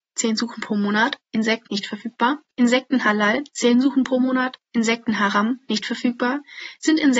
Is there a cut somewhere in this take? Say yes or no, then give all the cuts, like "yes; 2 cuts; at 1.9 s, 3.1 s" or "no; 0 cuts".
yes; 2 cuts; at 1.7 s, 4.7 s